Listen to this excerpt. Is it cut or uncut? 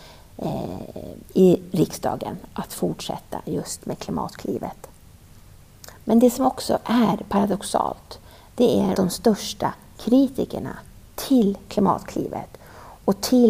cut